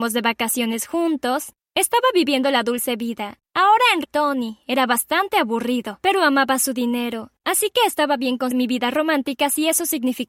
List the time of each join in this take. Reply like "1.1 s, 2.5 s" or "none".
4.0 s, 8.5 s